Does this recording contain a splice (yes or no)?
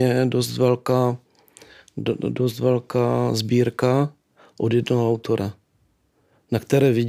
no